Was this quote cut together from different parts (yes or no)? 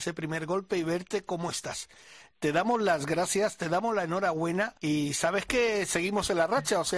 yes